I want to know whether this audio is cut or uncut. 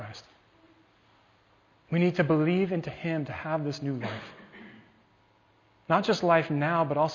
uncut